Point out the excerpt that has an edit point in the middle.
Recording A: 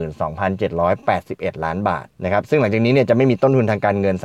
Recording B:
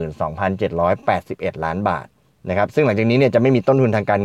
A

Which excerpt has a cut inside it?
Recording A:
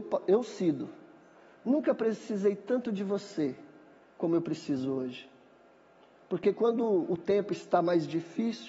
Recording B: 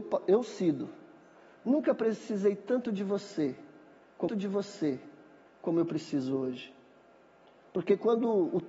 B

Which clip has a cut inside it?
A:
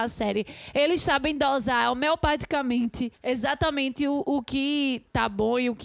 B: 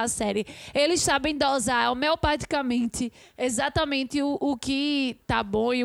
A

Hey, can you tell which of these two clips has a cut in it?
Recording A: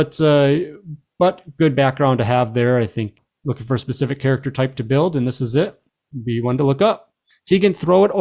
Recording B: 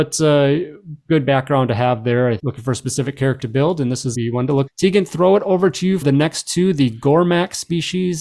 B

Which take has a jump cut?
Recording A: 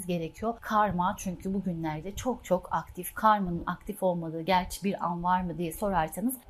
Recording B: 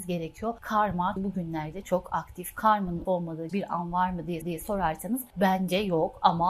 B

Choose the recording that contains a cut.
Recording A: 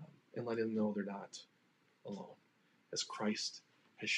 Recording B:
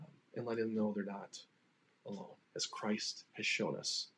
B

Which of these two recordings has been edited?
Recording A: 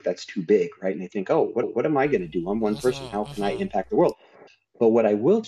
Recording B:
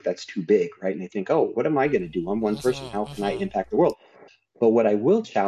A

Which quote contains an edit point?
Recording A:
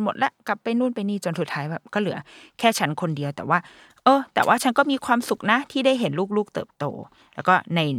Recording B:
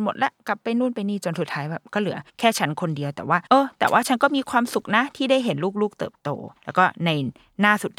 B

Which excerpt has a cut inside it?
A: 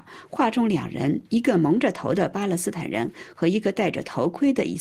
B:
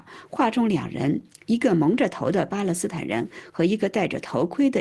A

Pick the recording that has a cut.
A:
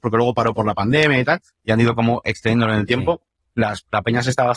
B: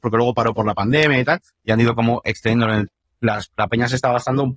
B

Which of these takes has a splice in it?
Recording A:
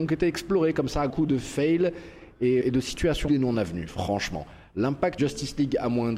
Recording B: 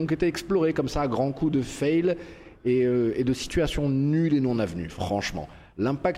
A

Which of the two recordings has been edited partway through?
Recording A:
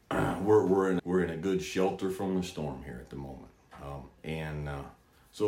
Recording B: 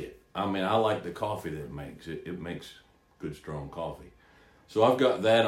A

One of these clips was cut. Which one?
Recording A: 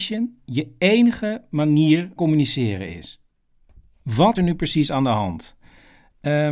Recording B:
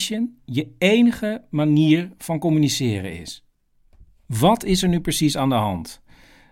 A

